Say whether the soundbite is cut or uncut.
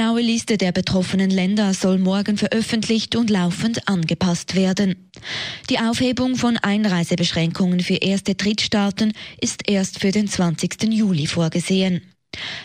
uncut